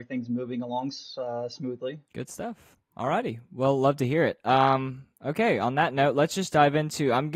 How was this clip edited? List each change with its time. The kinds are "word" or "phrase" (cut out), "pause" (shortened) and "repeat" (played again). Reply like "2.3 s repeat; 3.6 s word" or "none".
2.0 s pause; 2.8 s pause